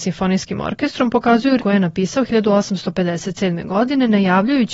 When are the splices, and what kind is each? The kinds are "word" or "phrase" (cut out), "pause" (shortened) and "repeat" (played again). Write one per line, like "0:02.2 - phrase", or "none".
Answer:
0:01.6 - word